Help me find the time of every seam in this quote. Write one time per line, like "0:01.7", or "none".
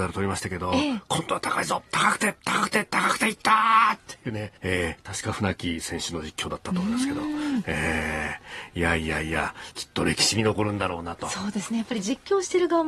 0:04.6
0:09.7